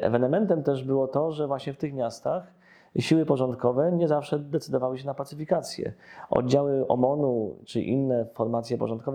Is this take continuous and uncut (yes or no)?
yes